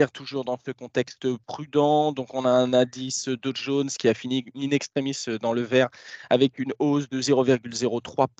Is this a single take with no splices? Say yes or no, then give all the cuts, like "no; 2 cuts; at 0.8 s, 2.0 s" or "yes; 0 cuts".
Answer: yes; 0 cuts